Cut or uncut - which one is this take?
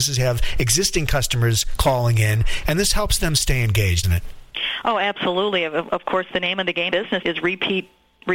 cut